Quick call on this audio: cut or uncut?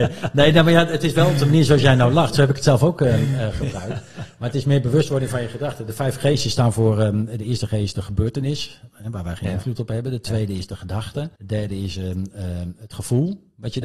cut